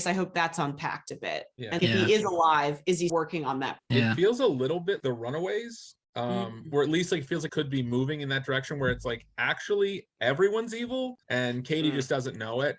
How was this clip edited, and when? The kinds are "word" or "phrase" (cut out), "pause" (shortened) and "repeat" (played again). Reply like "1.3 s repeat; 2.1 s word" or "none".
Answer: 1.8 s word; 3.1 s word; 3.8 s phrase; 5.0 s word; 6.0 s pause; 7.5 s word; 11.2 s pause

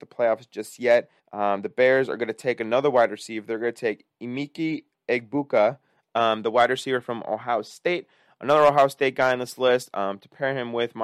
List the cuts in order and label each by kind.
1.2 s pause

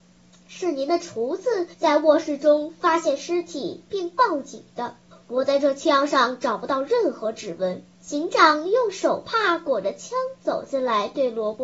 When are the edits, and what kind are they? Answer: 1.7 s pause; 5.1 s pause; 8.0 s pause

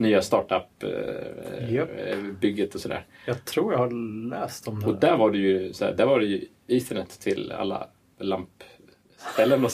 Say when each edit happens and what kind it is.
none

